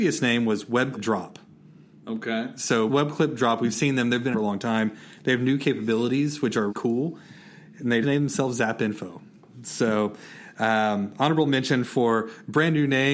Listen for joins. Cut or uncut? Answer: cut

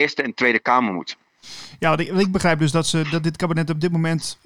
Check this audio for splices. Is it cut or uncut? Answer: uncut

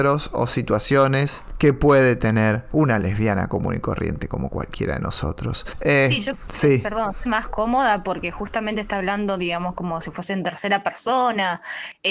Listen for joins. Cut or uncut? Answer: cut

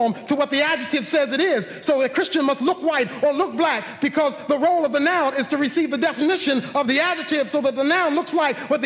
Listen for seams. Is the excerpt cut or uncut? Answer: uncut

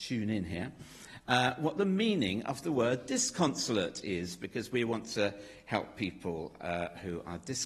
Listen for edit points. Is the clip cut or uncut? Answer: uncut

